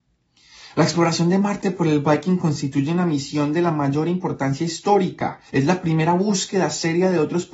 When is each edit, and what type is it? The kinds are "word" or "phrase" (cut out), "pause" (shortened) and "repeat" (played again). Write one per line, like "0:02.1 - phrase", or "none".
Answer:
0:05.5 - pause